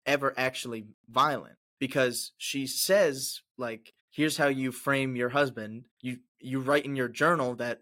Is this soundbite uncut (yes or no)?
no